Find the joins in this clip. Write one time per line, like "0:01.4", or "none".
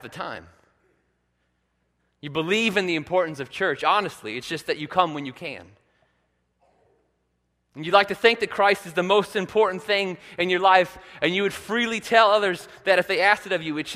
none